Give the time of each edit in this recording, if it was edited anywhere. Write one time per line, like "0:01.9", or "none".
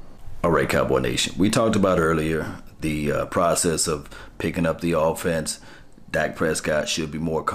none